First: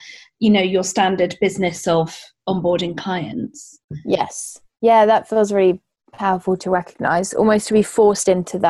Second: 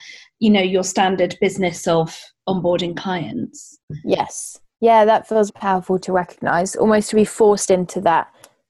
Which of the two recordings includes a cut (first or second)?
second